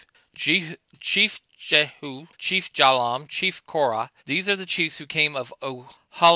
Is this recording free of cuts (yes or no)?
no